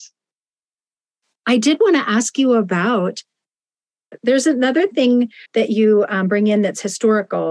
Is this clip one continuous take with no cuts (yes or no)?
no